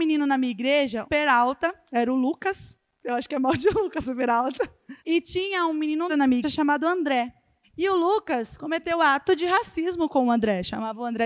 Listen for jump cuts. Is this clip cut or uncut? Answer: cut